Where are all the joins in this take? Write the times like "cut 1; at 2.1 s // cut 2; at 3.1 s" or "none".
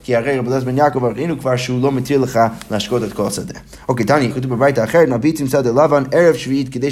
cut 1; at 4.3 s